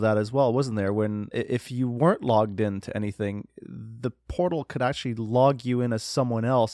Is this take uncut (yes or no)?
no